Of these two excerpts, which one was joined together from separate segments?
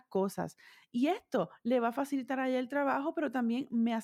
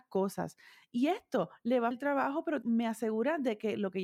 second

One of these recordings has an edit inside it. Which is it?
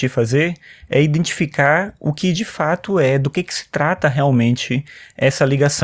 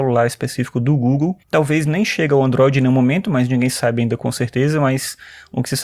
second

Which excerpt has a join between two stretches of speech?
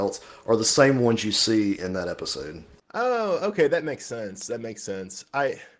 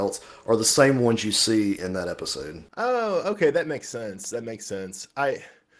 second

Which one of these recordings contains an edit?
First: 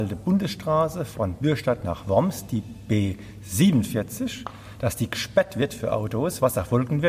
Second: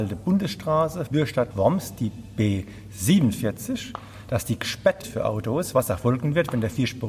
second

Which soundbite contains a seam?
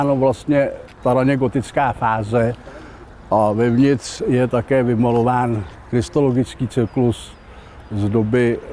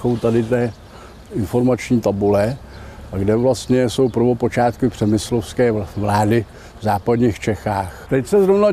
first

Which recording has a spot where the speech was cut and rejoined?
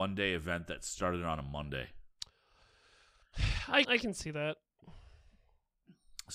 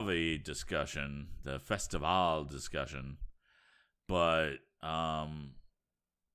first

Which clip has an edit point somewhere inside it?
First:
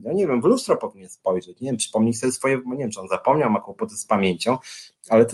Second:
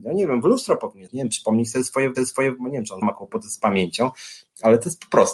second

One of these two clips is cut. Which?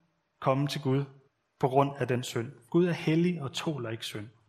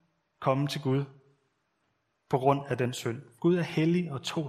first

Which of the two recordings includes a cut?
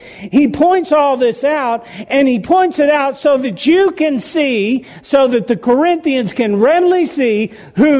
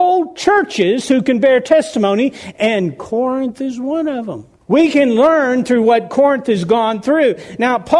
second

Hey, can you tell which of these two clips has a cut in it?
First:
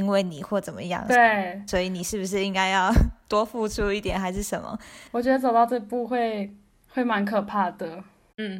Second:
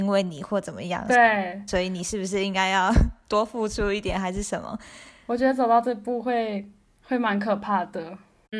first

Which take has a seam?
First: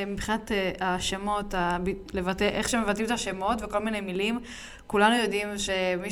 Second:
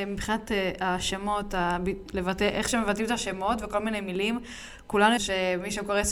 second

